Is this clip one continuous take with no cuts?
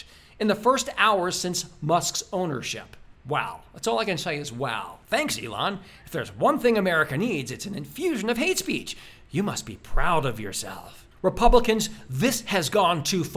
no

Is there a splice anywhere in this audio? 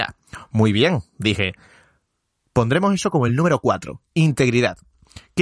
no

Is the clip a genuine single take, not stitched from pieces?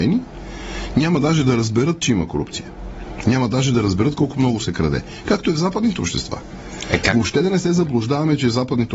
yes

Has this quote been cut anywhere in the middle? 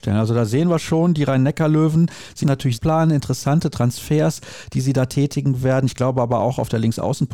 yes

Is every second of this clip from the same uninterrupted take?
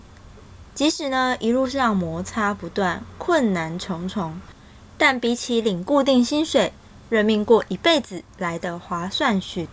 yes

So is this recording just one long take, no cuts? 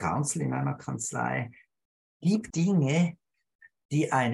no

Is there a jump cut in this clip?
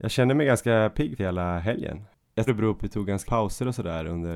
yes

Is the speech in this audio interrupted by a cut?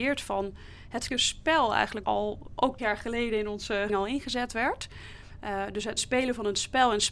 yes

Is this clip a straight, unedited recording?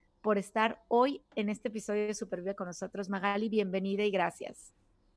yes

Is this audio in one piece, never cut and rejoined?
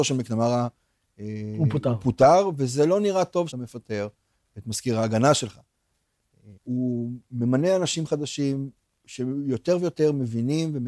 no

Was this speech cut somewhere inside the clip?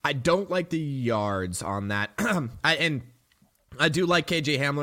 yes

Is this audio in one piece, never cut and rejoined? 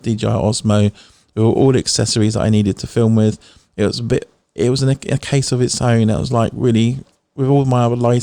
yes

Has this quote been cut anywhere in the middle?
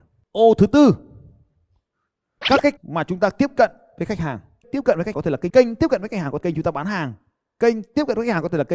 yes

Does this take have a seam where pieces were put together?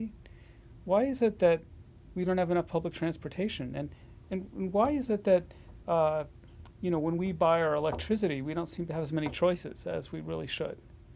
no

